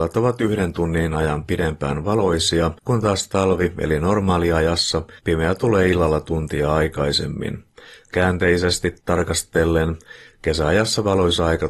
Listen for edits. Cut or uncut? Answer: cut